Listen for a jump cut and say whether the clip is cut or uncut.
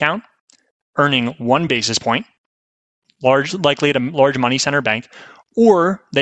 uncut